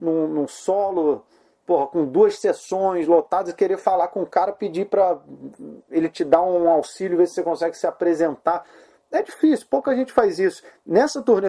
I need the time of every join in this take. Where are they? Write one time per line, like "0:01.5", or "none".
none

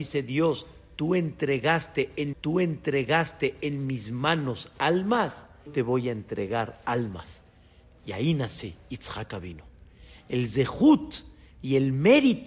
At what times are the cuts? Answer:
0:02.3
0:05.7

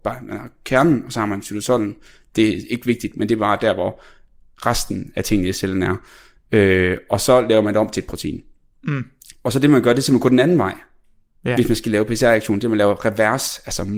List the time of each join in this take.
none

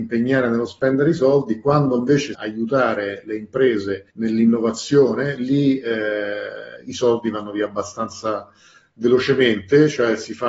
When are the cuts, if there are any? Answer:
0:02.3
0:04.1

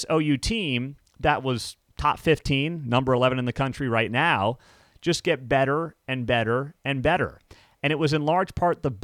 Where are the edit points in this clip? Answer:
none

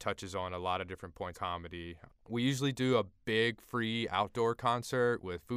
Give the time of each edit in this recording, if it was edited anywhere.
0:01.3

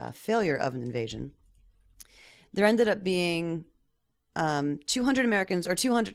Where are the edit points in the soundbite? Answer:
none

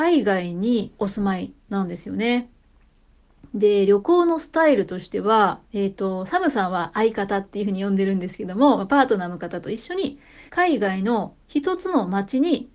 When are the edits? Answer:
0:01.0
0:05.6
0:10.5
0:11.4

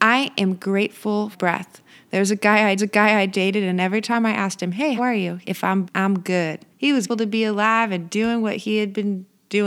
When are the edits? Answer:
0:01.3
0:02.8
0:05.0
0:05.4
0:05.8
0:06.7
0:07.1

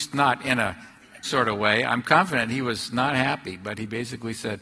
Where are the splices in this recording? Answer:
0:01.2

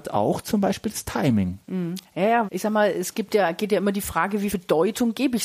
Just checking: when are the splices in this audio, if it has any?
0:02.5
0:04.5

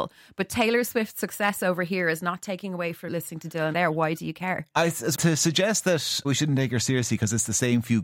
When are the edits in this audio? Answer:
0:03.1
0:03.7
0:05.1
0:06.2

